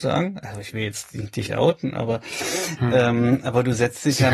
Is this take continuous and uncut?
no; 1 cut; at 1.5 s

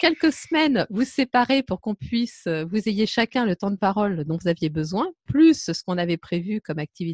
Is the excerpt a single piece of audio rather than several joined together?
yes; 0 cuts

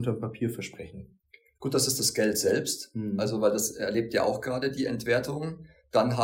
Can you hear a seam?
no; 0 cuts

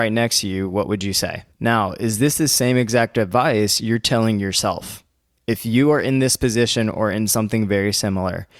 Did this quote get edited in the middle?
yes; 1 cut; at 1.5 s

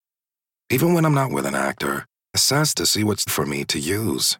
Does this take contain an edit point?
yes; 4 cuts; at 1.3 s, 2.3 s, 2.7 s, 3.3 s

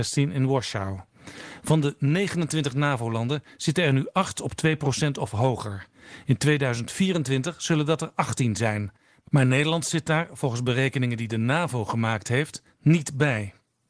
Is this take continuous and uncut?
yes; 0 cuts

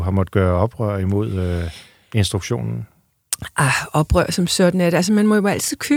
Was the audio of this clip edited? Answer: no; 0 cuts

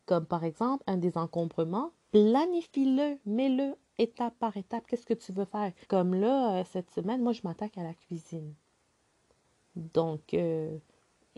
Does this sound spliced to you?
yes; 2 cuts; at 2.0 s, 5.8 s

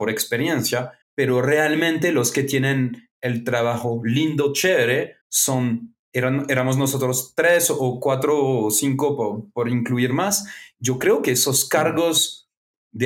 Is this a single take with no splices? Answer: no; 2 cuts; at 1.0 s, 5.2 s

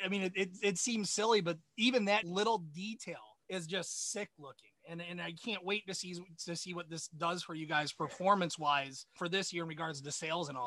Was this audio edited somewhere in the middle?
yes; 3 cuts; at 2.2 s, 3.4 s, 9.2 s

